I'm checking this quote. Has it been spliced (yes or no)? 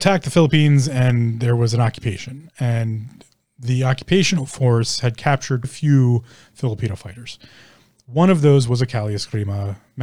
yes